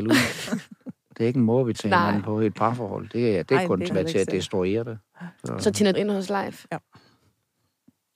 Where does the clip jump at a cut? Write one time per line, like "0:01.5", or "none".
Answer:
0:00.9
0:01.7
0:03.9
0:05.4
0:05.9